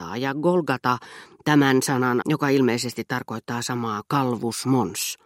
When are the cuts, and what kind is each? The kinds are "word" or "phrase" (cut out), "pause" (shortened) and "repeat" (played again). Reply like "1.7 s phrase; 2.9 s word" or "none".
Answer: 2.2 s word; 4.0 s word

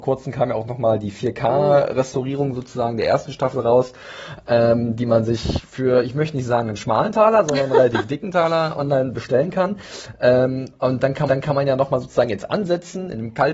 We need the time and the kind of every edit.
11.3 s repeat

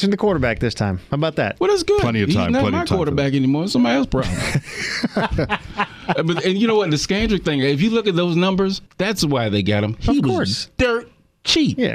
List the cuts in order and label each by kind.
8.9 s pause

